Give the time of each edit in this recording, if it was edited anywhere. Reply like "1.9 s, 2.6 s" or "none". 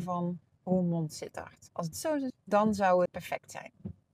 1.9 s, 2.3 s, 3.1 s